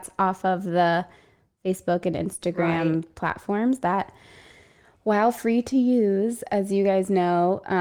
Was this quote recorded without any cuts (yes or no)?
yes